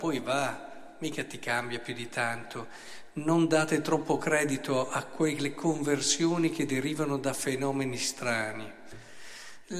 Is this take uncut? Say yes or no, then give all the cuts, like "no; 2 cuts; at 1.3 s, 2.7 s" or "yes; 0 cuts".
yes; 0 cuts